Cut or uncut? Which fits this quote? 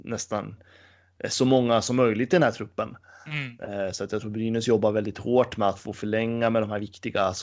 uncut